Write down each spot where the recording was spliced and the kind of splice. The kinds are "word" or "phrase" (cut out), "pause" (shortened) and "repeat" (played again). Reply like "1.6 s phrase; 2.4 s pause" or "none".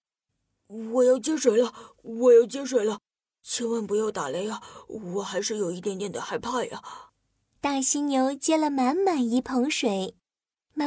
7.1 s pause